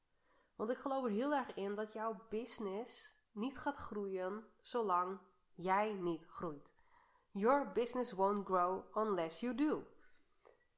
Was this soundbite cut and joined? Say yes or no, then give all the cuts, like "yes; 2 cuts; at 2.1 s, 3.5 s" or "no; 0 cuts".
yes; 1 cut; at 3.2 s